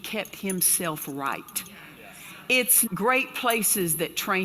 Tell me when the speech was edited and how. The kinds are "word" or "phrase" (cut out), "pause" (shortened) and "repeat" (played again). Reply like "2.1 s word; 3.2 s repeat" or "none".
2.9 s word

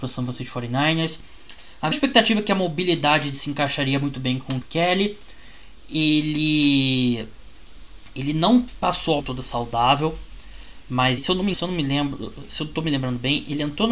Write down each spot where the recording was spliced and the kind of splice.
1.9 s word; 3.3 s word; 4.6 s word; 9.2 s word; 11.2 s word; 11.5 s word

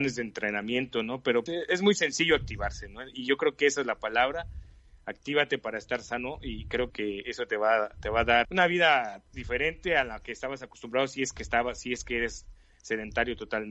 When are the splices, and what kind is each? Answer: 1.5 s word; 6.9 s word; 8.4 s word

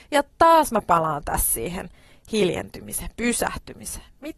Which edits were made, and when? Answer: none

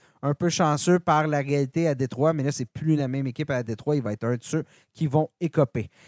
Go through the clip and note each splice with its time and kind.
none

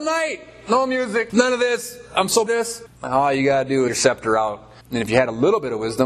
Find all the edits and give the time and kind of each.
2.5 s phrase; 2.9 s pause; 3.9 s phrase; 4.8 s pause

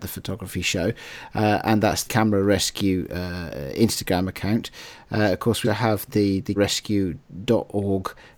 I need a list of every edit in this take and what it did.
2.1 s word; 5.6 s word; 6.1 s word; 6.6 s word

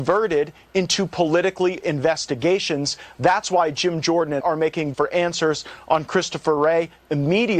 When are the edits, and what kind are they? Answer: 1.8 s word; 4.4 s word; 4.9 s word

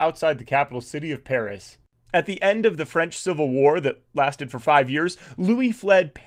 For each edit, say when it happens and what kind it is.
none

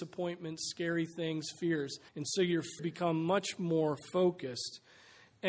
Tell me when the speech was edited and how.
2.1 s pause; 2.8 s word

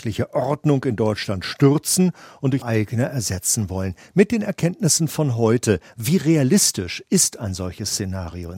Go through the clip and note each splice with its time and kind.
2.6 s word

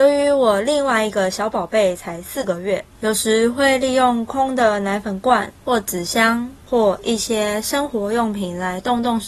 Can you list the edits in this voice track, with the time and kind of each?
2.9 s pause; 5.6 s pause; 6.6 s pause

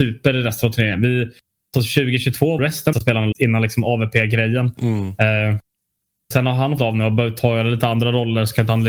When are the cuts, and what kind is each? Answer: 1.7 s word; 2.6 s word; 2.9 s word; 3.3 s word; 6.3 s word; 6.8 s word

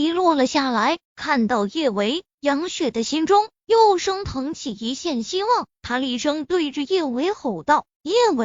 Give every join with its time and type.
1.1 s pause

